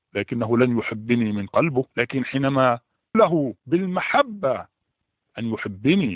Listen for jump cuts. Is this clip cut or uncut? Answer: cut